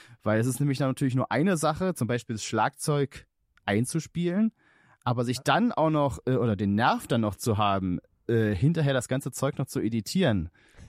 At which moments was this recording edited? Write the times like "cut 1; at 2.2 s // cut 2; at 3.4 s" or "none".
none